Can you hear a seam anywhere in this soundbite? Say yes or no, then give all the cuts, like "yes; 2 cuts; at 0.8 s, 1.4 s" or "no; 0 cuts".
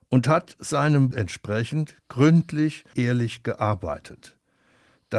yes; 2 cuts; at 1.1 s, 2.9 s